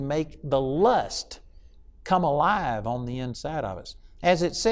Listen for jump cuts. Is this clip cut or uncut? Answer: uncut